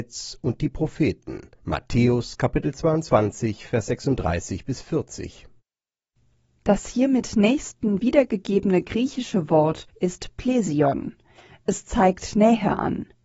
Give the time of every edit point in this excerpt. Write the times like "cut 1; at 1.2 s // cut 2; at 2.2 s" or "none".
cut 1; at 1.6 s // cut 2; at 9.9 s